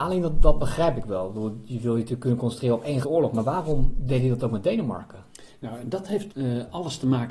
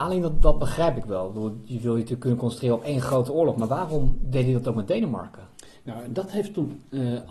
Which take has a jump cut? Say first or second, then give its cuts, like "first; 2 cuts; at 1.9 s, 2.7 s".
first; 2 cuts; at 3.0 s, 6.3 s